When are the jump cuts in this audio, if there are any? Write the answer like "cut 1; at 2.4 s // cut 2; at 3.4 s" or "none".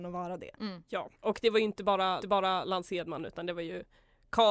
cut 1; at 1.1 s // cut 2; at 2.2 s